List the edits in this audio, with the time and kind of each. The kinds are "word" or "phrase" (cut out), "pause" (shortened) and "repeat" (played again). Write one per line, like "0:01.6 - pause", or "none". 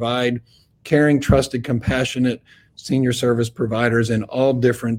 none